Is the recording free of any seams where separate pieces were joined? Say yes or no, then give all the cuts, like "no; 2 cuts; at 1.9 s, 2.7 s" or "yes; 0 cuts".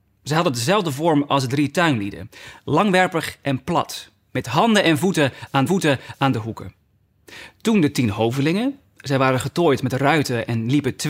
no; 1 cut; at 5.7 s